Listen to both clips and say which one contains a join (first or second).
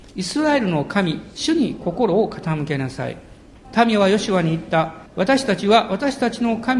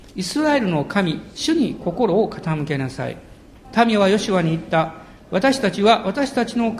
first